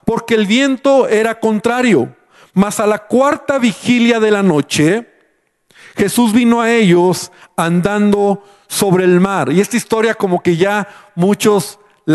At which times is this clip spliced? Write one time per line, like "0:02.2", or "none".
none